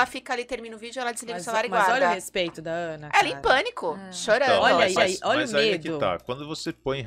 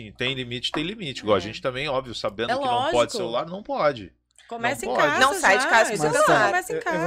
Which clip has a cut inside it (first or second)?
first